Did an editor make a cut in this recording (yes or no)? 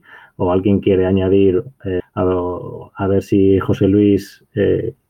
yes